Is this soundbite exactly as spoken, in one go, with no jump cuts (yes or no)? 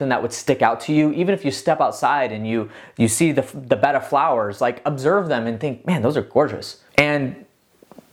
no